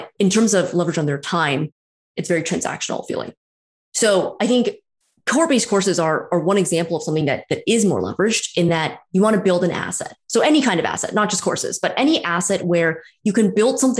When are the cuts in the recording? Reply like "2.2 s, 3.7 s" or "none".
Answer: none